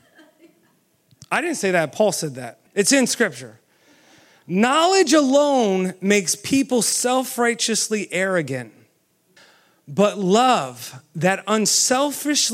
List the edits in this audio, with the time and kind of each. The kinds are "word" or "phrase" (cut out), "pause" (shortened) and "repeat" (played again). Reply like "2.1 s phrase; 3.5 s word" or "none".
2.7 s pause; 9.4 s pause